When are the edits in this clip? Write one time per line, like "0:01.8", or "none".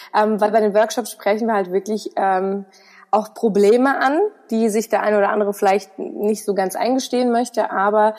none